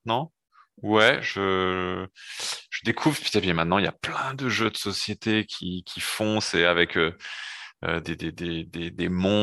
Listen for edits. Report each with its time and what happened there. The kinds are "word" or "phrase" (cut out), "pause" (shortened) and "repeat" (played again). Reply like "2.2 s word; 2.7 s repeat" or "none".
8.0 s word